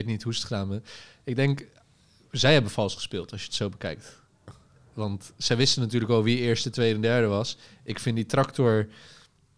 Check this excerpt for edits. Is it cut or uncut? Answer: uncut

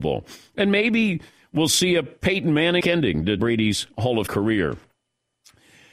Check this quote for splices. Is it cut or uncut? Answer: cut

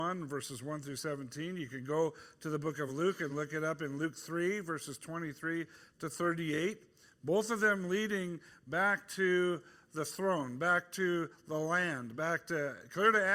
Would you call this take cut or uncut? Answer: uncut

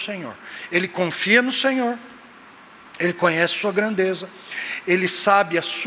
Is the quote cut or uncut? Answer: uncut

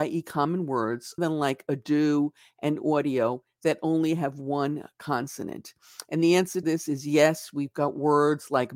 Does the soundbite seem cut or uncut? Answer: cut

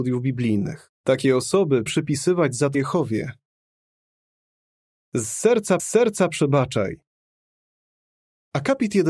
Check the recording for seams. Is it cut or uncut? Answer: cut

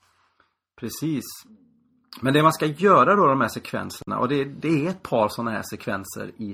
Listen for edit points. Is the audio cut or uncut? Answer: uncut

